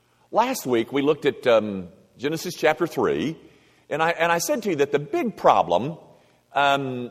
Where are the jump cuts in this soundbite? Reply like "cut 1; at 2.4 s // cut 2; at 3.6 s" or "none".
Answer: none